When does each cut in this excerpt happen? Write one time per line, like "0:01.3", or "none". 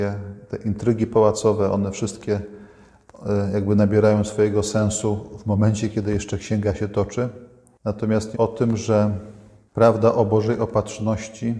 0:08.3

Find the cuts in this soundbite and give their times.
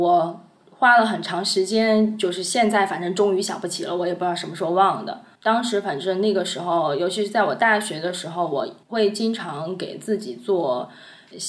0:05.3
0:08.8

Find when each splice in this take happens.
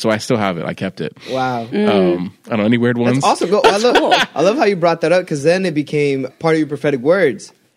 0:06.3

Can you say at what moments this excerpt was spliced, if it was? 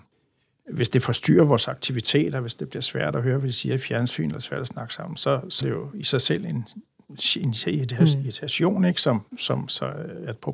0:05.6

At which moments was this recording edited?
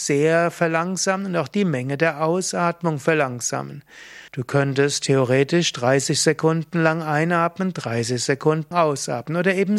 0:04.3
0:08.7

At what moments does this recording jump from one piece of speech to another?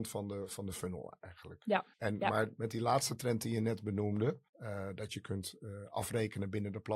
0:01.9
0:04.5

